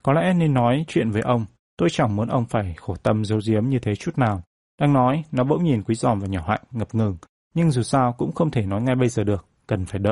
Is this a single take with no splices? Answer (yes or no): yes